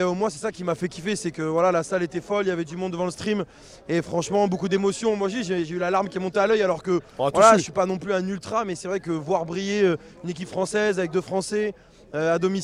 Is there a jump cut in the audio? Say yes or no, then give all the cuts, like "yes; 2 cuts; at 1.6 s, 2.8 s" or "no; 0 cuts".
no; 0 cuts